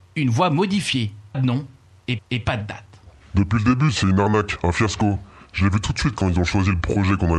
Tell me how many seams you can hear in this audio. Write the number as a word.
two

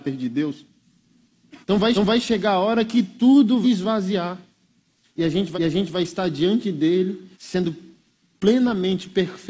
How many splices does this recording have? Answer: five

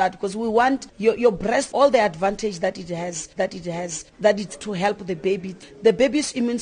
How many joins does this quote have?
three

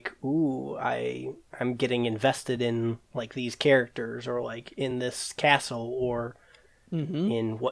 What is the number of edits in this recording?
zero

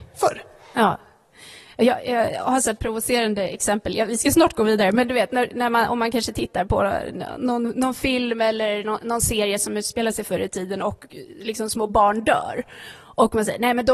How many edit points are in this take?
zero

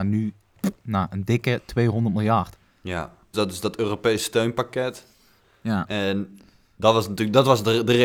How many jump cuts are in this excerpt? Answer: one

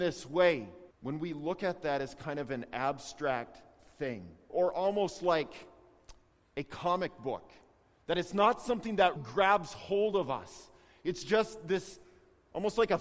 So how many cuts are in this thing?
three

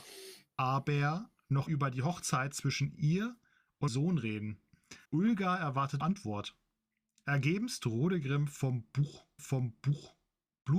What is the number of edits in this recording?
five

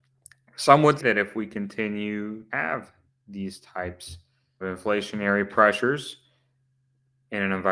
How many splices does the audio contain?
three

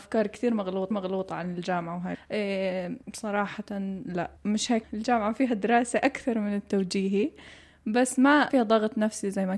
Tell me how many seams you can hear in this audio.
six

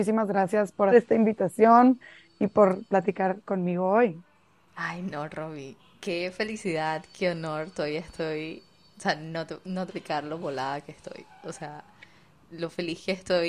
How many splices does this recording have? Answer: two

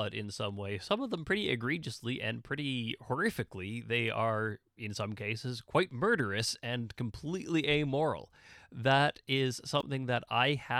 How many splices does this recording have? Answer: zero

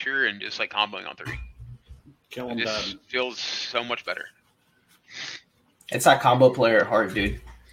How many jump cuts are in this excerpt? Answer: zero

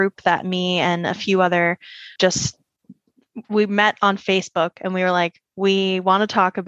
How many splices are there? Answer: one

